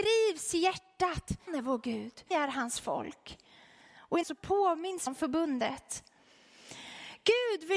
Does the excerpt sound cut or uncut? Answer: cut